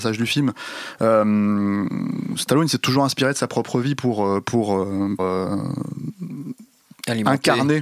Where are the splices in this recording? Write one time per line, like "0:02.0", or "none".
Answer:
0:05.2